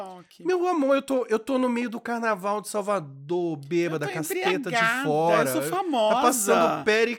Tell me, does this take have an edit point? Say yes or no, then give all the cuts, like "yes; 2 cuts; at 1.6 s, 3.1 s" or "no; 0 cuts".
no; 0 cuts